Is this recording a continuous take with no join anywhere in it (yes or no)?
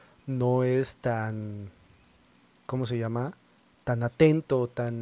yes